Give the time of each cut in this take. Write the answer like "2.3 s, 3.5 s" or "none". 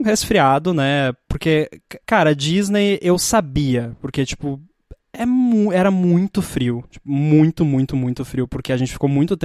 2.0 s